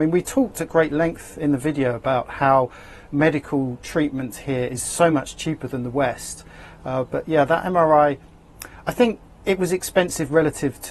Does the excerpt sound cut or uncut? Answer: uncut